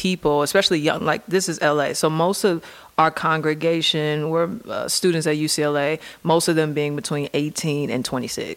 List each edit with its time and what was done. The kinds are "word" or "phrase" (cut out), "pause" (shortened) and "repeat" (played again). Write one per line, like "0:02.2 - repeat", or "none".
none